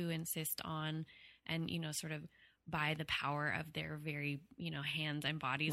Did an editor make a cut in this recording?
no; 0 cuts

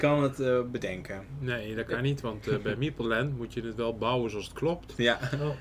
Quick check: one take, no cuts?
yes; 0 cuts

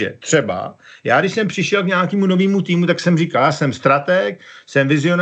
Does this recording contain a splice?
no; 0 cuts

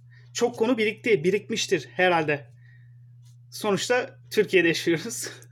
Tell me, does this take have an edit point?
no; 0 cuts

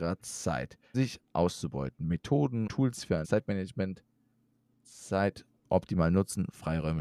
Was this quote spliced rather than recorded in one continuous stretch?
yes; 3 cuts; at 0.9 s, 2.7 s, 3.2 s

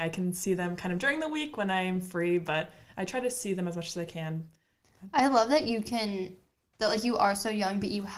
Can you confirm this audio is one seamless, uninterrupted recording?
yes; 0 cuts

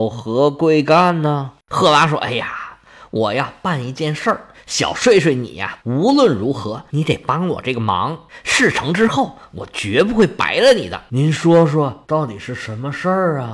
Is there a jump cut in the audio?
yes; 1 cut; at 5.8 s

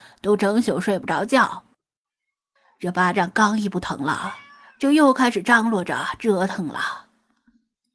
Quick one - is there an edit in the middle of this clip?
no; 0 cuts

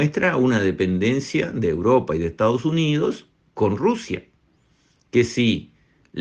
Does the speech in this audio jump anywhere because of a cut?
no; 0 cuts

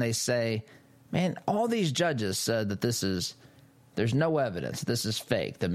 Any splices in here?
no; 0 cuts

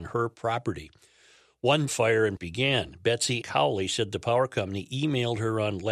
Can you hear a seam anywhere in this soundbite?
yes; 3 cuts; at 1.9 s, 2.4 s, 3.4 s

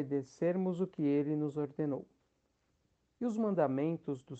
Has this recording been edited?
no; 0 cuts

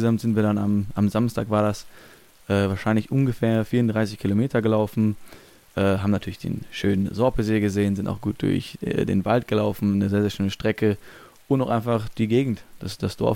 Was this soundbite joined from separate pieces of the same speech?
no; 0 cuts

